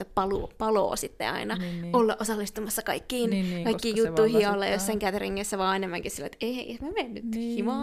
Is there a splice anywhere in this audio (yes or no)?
no